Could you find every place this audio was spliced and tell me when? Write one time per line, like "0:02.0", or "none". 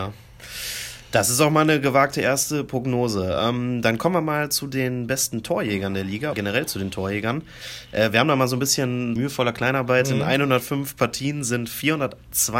0:06.3
0:09.2